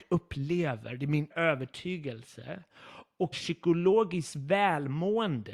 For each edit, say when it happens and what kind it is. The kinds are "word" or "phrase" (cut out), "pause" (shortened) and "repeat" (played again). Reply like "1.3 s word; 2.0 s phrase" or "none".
1.3 s word; 3.3 s word

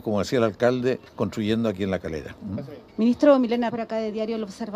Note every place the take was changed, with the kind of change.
1.1 s pause; 2.9 s pause; 3.7 s word

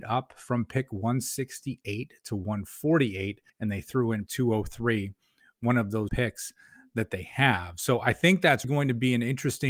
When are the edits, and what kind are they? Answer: 3.5 s pause; 4.3 s word; 6.1 s phrase; 8.6 s word

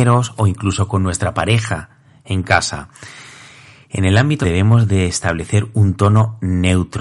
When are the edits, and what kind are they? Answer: 4.4 s word

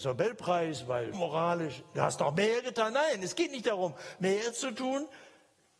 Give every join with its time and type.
1.1 s word

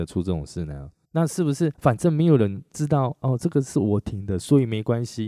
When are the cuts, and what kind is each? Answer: 1.0 s pause; 1.7 s pause

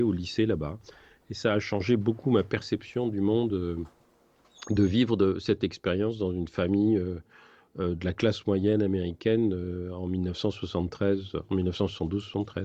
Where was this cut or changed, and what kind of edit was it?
none

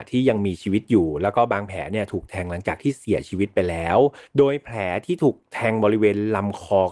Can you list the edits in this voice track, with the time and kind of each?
4.3 s pause

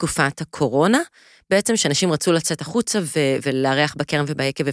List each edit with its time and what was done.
none

